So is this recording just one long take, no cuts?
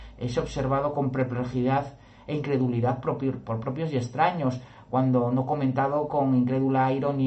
yes; 0 cuts

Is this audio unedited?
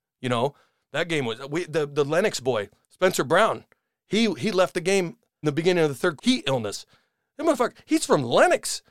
no; 4 cuts; at 1.7 s, 2.8 s, 5.4 s, 6.2 s

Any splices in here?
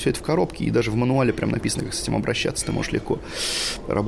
no; 0 cuts

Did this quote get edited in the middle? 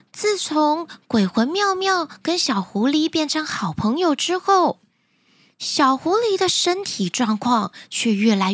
no; 0 cuts

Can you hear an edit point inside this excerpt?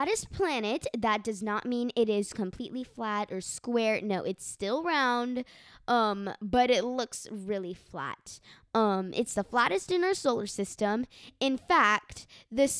no; 0 cuts

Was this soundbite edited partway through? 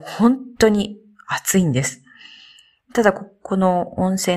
no; 0 cuts

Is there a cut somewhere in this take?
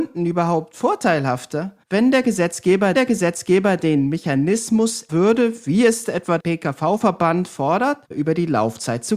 yes; 5 cuts; at 1.8 s, 2.9 s, 5.1 s, 6.4 s, 8.1 s

